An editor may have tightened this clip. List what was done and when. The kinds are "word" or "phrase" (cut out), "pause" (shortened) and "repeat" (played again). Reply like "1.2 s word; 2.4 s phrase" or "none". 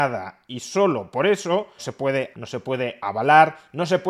1.8 s word; 2.3 s word

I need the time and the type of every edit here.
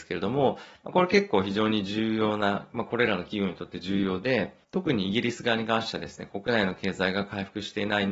4.6 s pause

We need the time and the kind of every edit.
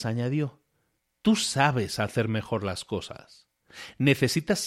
none

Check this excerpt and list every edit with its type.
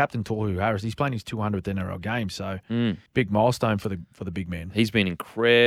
3.1 s pause

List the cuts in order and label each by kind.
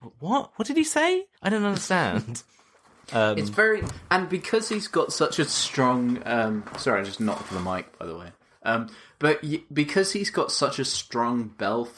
1.4 s pause; 2.5 s pause

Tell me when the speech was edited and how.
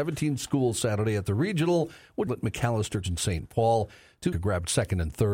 2.3 s phrase; 3.0 s word; 4.3 s phrase

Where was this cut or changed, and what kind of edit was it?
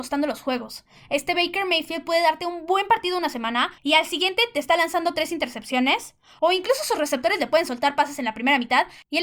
3.8 s pause

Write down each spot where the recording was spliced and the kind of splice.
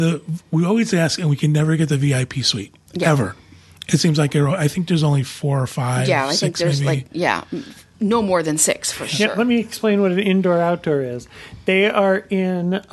none

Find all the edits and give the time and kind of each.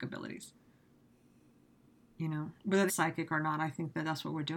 2.9 s phrase

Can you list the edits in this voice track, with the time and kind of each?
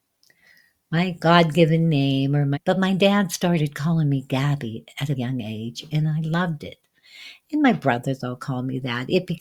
2.5 s phrase; 5.1 s word

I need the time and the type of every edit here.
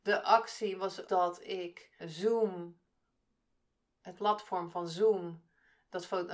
1.1 s word; 2.0 s word; 4.1 s word

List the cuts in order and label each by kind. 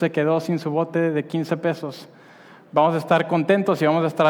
none

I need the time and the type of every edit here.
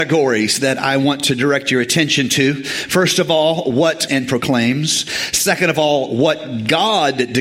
4.1 s phrase

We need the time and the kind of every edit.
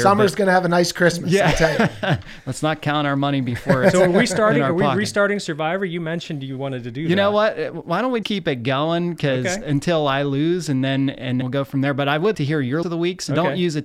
8.2 s word; 11.4 s word; 12.3 s word; 12.8 s word

